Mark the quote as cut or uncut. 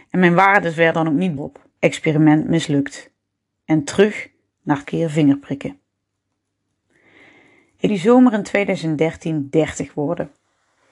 cut